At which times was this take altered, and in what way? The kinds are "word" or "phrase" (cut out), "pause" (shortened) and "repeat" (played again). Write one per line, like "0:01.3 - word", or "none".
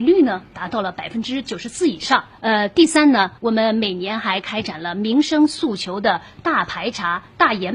0:02.3 - pause
0:03.4 - pause